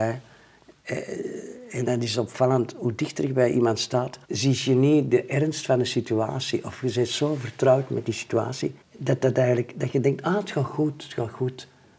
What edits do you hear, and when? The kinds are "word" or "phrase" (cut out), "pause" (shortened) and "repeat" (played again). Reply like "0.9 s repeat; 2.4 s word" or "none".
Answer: 4.2 s pause; 8.8 s pause